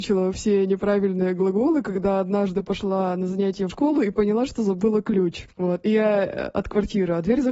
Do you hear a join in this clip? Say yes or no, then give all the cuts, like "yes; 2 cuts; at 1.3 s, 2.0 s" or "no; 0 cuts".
yes; 2 cuts; at 3.7 s, 5.5 s